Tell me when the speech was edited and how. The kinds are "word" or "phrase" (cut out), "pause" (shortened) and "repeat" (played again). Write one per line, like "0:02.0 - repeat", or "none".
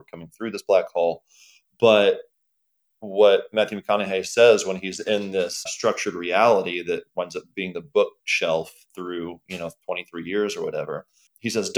0:05.7 - word